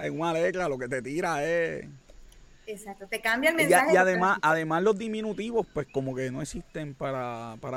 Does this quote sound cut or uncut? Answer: uncut